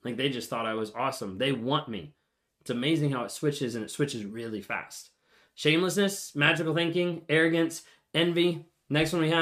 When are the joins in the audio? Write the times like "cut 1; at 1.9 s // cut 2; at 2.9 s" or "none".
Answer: none